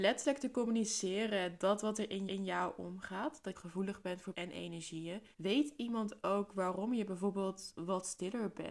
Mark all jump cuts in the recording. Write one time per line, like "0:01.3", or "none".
0:02.3
0:03.5
0:04.3
0:05.3

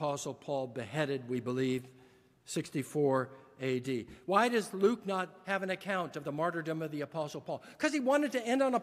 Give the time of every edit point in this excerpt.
none

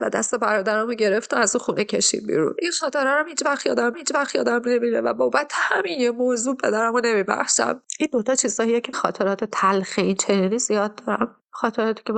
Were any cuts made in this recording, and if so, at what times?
0:03.9
0:08.9

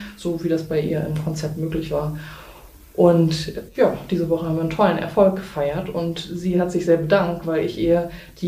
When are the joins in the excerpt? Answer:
none

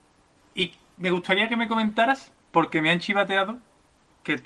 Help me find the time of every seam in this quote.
0:02.4

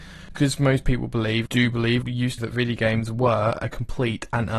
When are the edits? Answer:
0:01.5
0:02.0
0:02.4

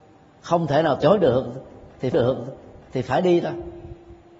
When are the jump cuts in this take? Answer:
0:01.0
0:02.1

